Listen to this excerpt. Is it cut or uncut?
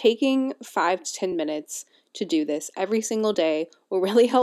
uncut